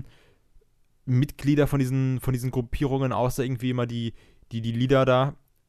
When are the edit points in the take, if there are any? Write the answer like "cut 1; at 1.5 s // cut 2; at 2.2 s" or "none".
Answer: none